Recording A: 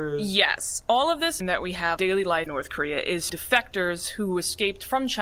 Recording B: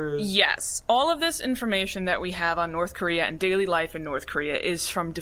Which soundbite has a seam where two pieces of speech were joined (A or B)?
A